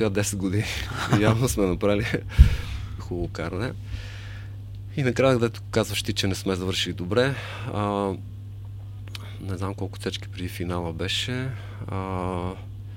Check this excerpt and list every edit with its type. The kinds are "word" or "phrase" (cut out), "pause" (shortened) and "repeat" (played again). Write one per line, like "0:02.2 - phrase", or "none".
0:03.0 - word

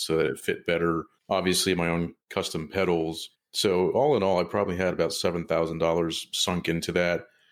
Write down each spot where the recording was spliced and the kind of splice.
0:01.2 - pause
0:02.2 - pause
0:03.4 - pause

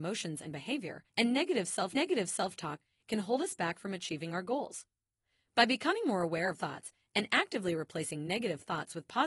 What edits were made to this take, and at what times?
0:01.1 - pause
0:02.0 - repeat
0:06.6 - word

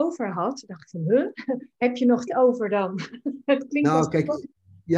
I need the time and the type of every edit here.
0:01.7 - pause
0:02.3 - word

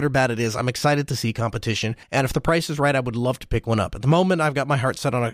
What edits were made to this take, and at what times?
0:02.0 - pause

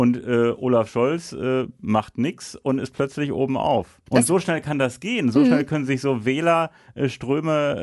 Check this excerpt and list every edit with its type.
0:04.1 - pause

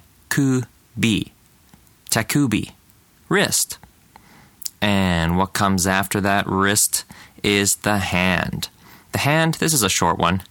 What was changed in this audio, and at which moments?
none

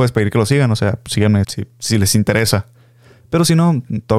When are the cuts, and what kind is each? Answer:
0:01.4 - word

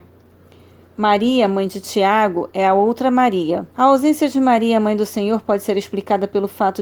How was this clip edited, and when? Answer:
0:03.7 - pause

